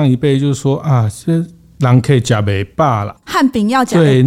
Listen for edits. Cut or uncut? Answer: uncut